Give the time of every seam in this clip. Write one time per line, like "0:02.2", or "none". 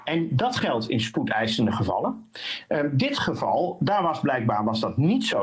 none